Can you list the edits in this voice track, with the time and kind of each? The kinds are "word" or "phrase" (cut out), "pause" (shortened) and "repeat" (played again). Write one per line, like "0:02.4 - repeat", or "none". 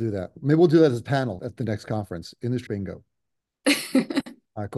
0:01.4 - word
0:02.7 - word

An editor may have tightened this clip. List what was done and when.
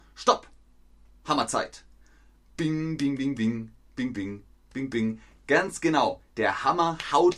none

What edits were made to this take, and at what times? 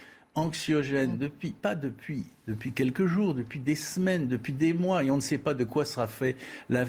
none

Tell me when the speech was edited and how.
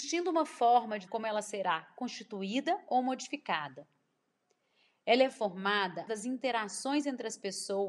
0:01.1 - word
0:06.1 - word

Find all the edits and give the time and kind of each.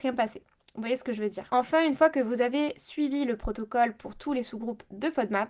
none

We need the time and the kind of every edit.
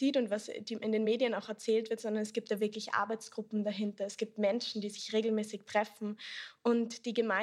none

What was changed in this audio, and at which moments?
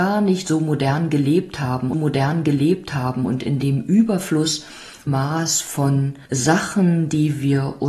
0:01.9 - repeat
0:05.1 - phrase
0:06.3 - pause

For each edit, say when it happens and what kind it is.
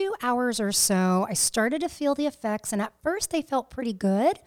none

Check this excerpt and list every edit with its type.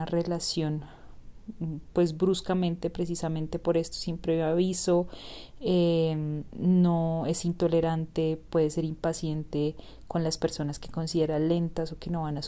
none

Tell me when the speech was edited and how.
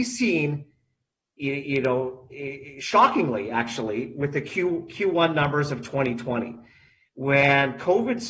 none

